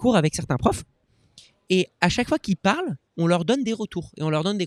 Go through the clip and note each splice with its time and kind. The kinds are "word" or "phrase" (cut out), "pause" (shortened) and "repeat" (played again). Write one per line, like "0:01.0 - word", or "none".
none

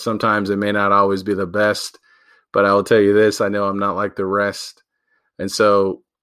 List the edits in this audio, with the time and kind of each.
none

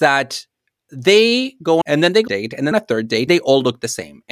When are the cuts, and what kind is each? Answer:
0:01.8 - phrase
0:02.3 - phrase
0:02.7 - phrase
0:03.3 - word

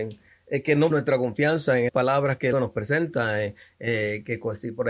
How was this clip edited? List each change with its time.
0:00.9 - word
0:01.9 - word
0:02.5 - word

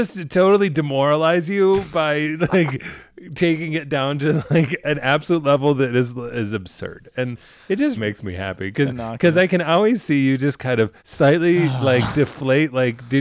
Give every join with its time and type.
0:08.0 - word
0:11.0 - pause

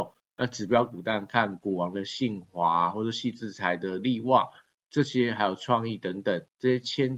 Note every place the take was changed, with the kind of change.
none

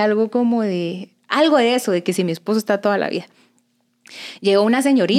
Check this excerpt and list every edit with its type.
none

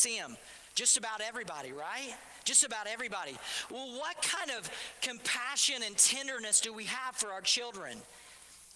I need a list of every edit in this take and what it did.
none

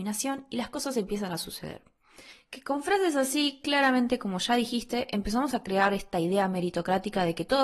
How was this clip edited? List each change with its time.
0:02.3 - pause

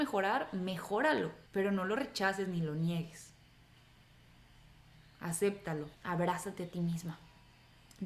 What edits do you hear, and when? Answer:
0:01.5 - pause
0:05.9 - pause

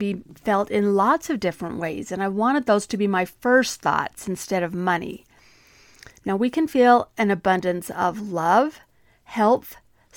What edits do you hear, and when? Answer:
none

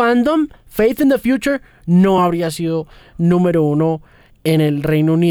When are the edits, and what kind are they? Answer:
none

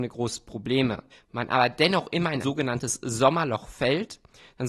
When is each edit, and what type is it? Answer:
0:01.1 - pause
0:02.4 - word

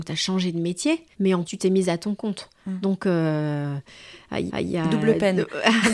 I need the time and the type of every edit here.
0:01.1 - pause
0:01.5 - word
0:02.6 - pause
0:04.5 - repeat

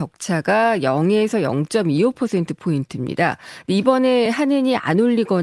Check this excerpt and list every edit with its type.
none

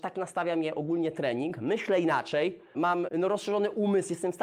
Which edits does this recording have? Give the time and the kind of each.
0:03.1 - word

